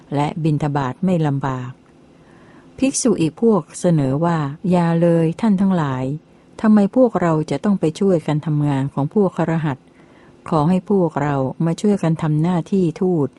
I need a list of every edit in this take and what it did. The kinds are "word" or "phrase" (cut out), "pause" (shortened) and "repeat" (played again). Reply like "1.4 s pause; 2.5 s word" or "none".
4.6 s pause